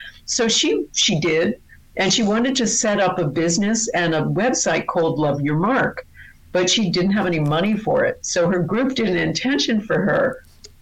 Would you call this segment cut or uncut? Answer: uncut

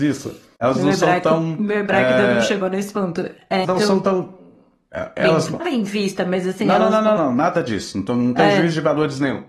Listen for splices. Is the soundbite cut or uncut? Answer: cut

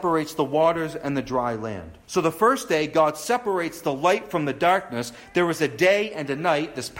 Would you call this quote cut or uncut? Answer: cut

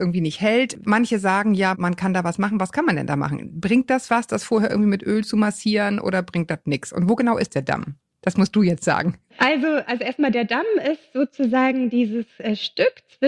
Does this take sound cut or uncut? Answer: cut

